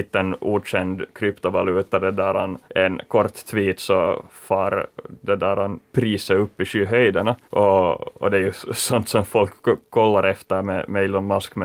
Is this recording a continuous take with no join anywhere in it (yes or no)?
no